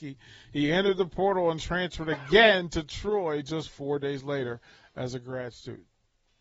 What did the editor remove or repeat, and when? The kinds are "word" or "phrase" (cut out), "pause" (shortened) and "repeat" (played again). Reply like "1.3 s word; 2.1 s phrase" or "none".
none